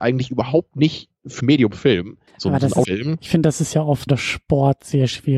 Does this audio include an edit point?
yes; 4 cuts; at 1.4 s, 2.3 s, 2.8 s, 4.1 s

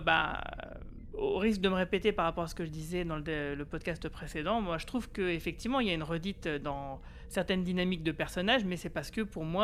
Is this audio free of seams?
yes; 0 cuts

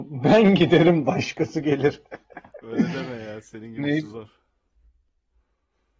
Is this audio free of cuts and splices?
yes; 0 cuts

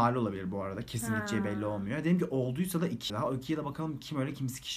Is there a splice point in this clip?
yes; 1 cut; at 3.1 s

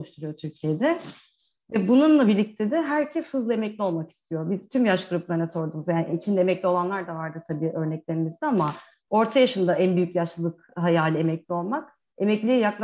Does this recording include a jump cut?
no; 0 cuts

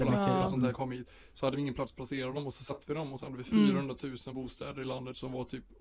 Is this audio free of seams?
yes; 0 cuts

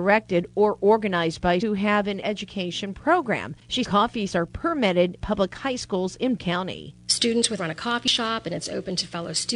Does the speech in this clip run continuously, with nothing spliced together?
no; 7 cuts; at 1.6 s, 2.2 s, 3.8 s, 4.3 s, 5.2 s, 6.4 s, 7.6 s

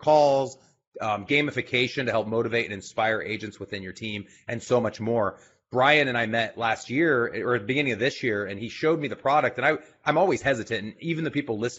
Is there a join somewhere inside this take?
no; 0 cuts

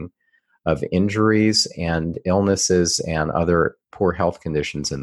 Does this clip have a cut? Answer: yes; 1 cut; at 3.8 s

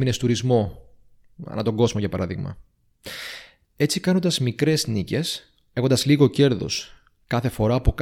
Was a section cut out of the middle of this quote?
no; 0 cuts

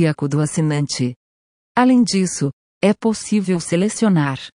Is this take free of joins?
yes; 0 cuts

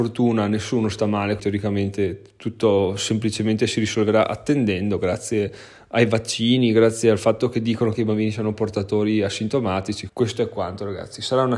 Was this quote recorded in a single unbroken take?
no; 2 cuts; at 1.4 s, 10.1 s

